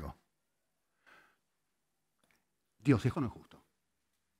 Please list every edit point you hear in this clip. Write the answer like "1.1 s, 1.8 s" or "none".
3.1 s